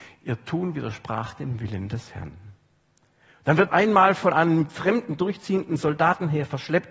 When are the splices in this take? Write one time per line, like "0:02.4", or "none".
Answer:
0:03.7